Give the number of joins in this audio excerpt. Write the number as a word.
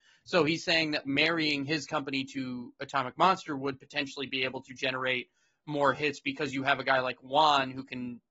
one